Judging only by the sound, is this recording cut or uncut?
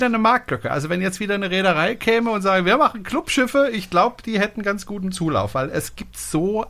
uncut